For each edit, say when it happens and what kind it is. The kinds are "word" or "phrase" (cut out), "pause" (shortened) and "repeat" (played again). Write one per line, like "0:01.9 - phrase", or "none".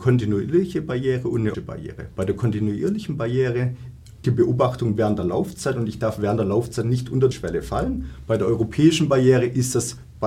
0:01.5 - word
0:04.2 - word
0:07.3 - word